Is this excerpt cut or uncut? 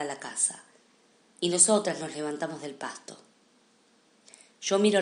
uncut